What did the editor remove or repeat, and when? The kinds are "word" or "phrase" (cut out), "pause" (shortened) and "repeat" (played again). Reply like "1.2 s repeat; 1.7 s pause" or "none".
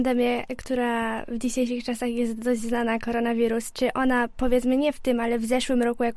none